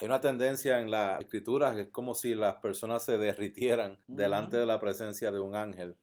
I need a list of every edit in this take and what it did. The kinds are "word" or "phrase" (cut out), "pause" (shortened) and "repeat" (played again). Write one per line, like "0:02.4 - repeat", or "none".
0:01.2 - word
0:04.0 - pause